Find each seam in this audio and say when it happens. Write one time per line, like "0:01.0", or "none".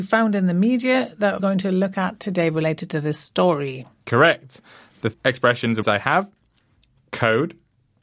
0:01.4
0:05.1
0:05.8